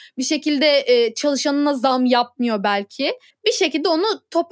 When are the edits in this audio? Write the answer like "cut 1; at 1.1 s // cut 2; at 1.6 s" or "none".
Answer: cut 1; at 3.3 s